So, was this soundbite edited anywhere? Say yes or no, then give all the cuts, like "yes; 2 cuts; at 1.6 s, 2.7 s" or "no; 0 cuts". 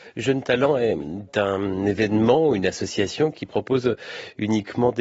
no; 0 cuts